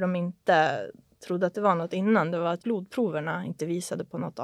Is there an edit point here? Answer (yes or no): yes